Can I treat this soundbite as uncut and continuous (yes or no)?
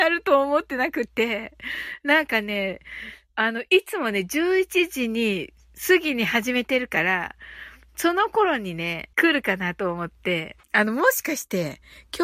no